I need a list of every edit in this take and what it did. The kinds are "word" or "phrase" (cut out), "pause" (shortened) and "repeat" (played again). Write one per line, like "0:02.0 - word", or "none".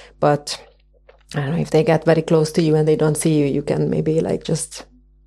none